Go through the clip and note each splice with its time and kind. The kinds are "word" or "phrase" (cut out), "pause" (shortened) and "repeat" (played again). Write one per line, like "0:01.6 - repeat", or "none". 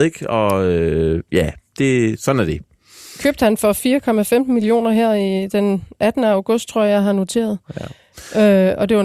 none